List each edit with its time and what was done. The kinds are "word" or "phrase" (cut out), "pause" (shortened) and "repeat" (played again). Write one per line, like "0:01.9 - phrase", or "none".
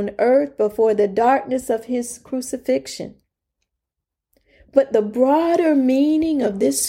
none